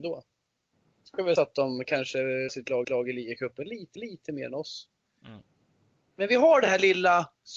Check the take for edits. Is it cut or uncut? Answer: cut